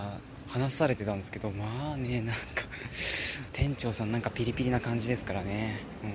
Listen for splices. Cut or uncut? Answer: cut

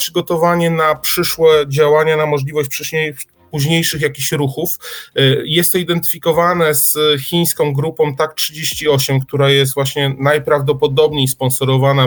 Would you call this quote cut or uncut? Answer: uncut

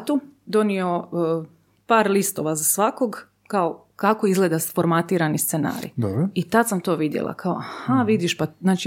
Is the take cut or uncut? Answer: uncut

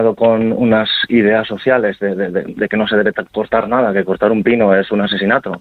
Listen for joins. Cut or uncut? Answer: uncut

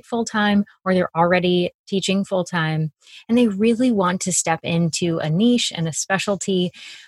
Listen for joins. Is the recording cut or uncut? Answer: uncut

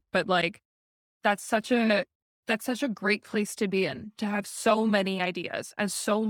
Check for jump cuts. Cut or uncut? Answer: uncut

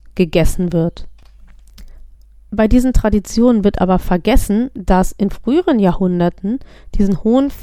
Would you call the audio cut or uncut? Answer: cut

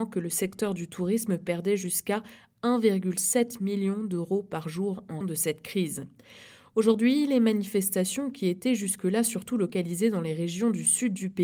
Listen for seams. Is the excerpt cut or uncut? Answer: cut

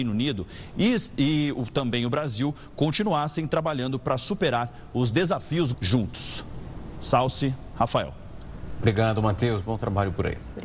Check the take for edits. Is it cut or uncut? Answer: cut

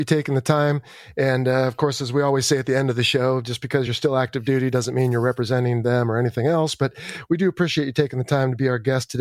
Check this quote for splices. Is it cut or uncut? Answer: uncut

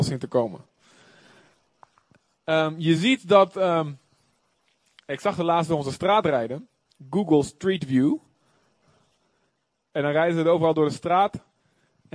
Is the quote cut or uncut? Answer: uncut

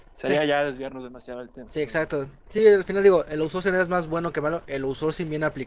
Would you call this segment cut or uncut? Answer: uncut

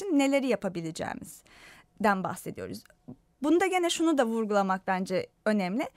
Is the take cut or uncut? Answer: uncut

